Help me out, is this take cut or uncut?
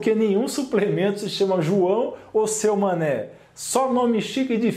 uncut